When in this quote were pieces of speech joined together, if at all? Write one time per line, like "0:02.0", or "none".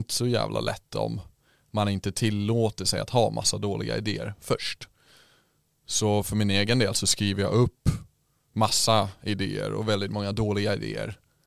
none